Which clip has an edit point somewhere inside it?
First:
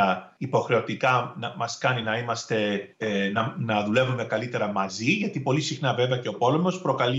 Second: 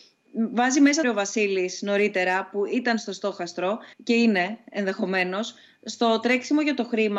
second; 2 cuts; at 1.0 s, 3.9 s

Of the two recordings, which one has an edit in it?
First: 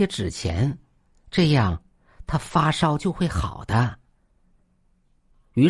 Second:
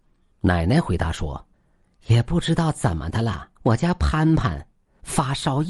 second; 2 cuts; at 1.5 s, 3.6 s

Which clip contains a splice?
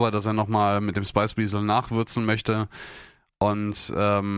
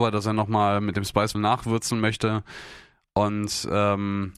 second; 1 cut; at 1.3 s

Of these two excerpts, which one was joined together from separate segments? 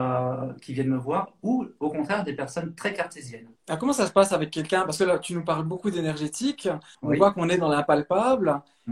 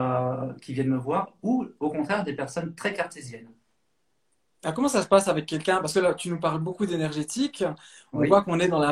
first; 2 cuts; at 3.6 s, 6.9 s

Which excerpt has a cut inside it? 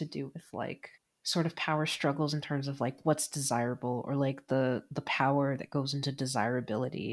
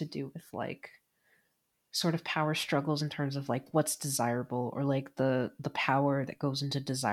first; 1 cut; at 1.0 s

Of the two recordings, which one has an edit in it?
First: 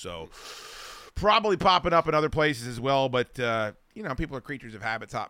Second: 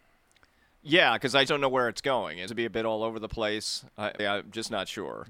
second; 3 cuts; at 1.5 s, 2.5 s, 4.2 s

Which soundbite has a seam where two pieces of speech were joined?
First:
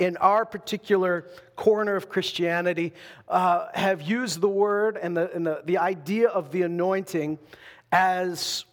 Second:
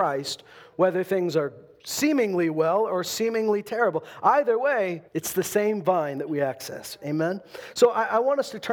second; 1 cut; at 5.1 s

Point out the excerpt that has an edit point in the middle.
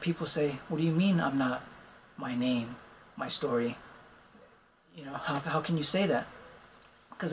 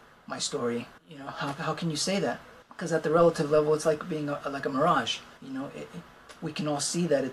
second; 3 cuts; at 1.0 s, 2.6 s, 5.4 s

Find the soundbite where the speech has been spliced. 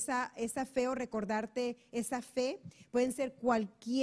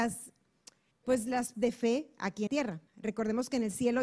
second; 4 cuts; at 0.9 s, 1.5 s, 2.5 s, 2.9 s

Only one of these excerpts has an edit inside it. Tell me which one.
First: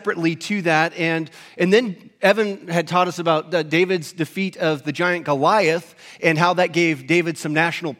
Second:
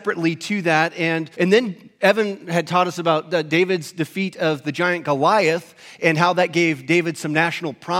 second; 1 cut; at 1.3 s

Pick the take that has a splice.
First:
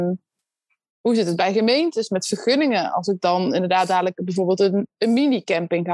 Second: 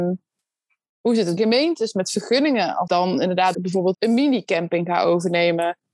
second; 4 cuts; at 1.4 s, 2.9 s, 3.5 s, 3.9 s

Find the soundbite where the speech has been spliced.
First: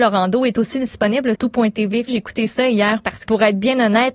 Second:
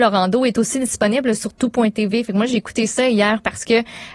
first; 3 cuts; at 1.4 s, 2.1 s, 3.3 s

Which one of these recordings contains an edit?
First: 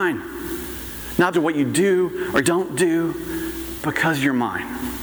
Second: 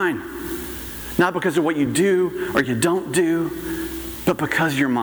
first; 3 cuts; at 1.3 s, 2.4 s, 3.8 s

